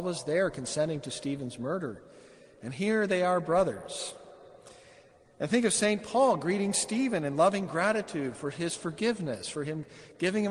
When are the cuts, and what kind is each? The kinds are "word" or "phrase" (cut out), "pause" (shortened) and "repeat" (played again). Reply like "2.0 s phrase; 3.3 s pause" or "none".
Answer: none

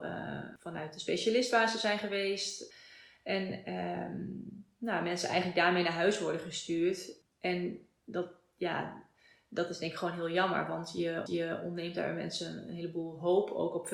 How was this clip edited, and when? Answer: 11.3 s repeat

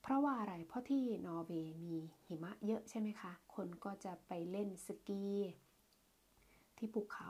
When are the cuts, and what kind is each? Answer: 3.4 s pause

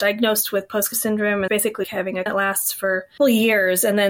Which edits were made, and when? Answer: 0.9 s word; 1.5 s word; 1.8 s word; 2.3 s word; 3.2 s word

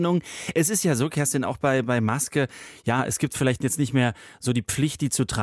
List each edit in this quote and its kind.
none

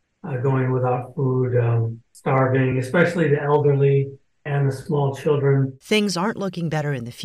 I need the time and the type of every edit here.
none

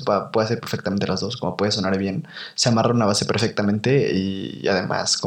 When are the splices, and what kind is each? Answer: none

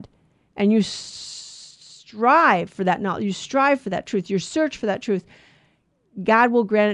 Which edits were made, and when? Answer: none

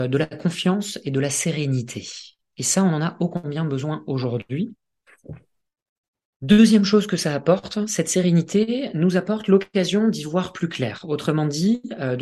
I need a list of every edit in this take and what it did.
none

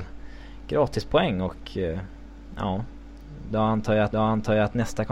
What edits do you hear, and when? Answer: 4.1 s repeat

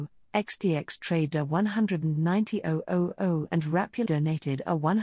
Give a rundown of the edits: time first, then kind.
1.3 s word; 4.1 s word

